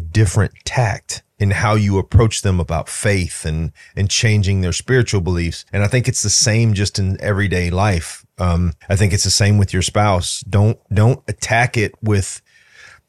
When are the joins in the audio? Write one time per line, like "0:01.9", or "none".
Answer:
0:01.3
0:05.7
0:08.8
0:10.8